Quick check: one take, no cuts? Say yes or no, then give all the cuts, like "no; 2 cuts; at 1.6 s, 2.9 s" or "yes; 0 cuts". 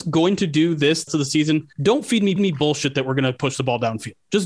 no; 3 cuts; at 1.1 s, 1.7 s, 2.4 s